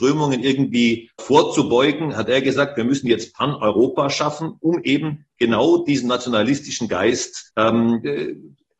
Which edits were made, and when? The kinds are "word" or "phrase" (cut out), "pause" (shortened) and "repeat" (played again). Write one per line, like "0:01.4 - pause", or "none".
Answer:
0:01.2 - word
0:07.5 - pause